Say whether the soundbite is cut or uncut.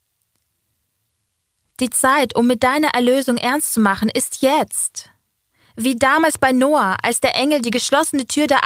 uncut